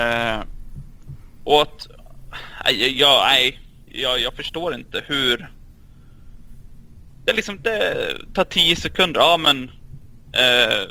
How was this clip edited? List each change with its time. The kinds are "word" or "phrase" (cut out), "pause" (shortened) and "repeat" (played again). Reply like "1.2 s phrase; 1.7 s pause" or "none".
none